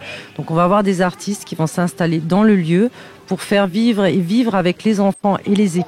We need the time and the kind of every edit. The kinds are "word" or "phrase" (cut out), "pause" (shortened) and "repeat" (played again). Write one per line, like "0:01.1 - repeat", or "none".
none